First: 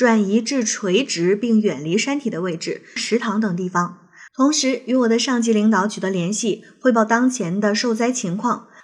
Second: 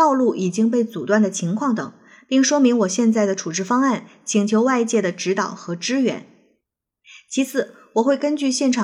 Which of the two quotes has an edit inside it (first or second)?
first